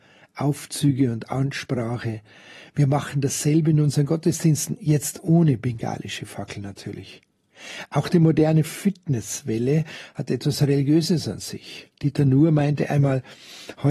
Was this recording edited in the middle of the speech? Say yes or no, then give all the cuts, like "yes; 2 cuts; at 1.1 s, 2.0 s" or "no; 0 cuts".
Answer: no; 0 cuts